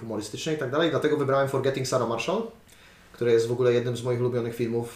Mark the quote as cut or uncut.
uncut